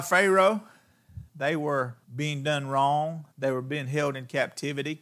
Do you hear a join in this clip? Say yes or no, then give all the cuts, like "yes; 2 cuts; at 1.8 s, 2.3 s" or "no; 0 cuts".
yes; 3 cuts; at 1.3 s, 2.0 s, 3.3 s